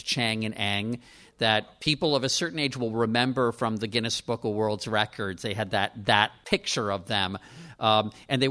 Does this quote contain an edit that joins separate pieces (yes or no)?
no